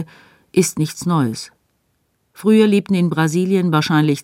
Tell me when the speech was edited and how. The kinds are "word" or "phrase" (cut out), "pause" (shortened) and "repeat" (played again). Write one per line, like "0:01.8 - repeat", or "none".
none